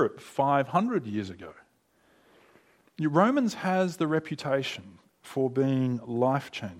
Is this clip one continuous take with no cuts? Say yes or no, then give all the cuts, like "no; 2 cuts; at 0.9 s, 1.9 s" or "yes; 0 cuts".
yes; 0 cuts